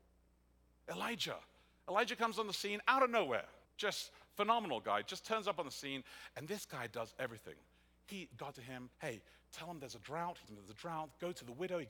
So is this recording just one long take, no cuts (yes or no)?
no